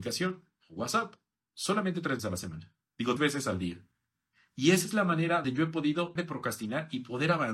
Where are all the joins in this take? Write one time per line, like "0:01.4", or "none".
0:02.2
0:03.2
0:05.4
0:06.2